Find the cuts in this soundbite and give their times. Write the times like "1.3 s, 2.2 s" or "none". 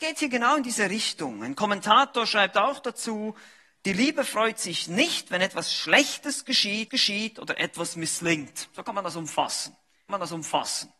6.9 s, 10.1 s